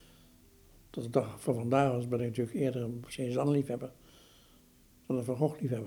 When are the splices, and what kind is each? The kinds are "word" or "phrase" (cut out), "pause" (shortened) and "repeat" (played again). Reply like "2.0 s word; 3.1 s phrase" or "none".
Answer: none